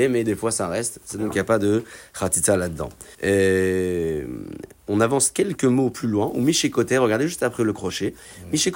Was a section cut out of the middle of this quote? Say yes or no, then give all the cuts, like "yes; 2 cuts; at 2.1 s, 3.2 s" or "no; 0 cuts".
yes; 1 cut; at 3.1 s